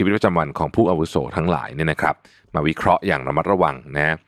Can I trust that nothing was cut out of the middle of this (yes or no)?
yes